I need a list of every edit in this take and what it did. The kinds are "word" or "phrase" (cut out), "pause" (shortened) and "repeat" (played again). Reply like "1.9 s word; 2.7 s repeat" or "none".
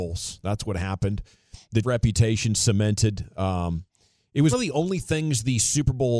1.8 s word; 4.5 s word

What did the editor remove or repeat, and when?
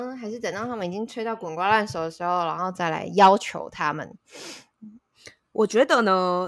none

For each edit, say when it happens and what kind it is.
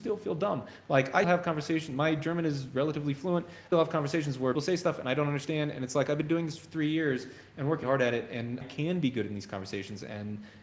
1.2 s word; 3.7 s word; 4.5 s word; 7.8 s word; 8.6 s word

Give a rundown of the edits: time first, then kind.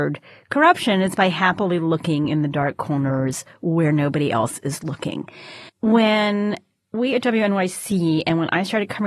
5.7 s pause

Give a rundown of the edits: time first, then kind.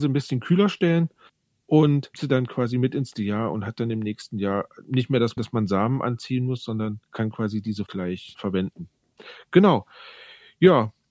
2.1 s word; 3.1 s word; 5.4 s word; 7.0 s pause; 7.9 s word; 8.3 s word

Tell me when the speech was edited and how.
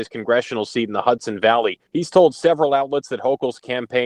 1.9 s pause

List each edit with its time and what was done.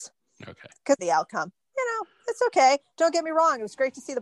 1.0 s phrase

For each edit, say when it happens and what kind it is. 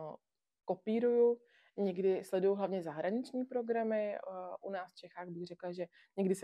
none

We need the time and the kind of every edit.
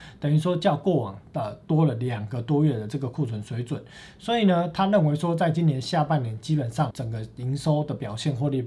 6.9 s word

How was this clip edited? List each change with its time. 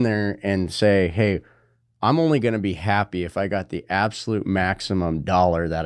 none

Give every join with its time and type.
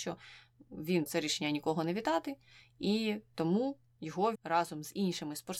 1.1 s word; 4.3 s word

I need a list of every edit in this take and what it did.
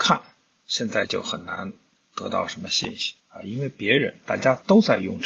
3.2 s pause

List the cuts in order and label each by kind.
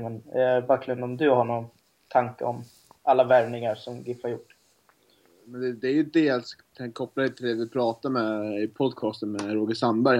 none

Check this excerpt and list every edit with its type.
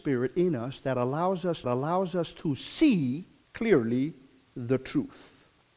1.6 s repeat; 3.4 s pause

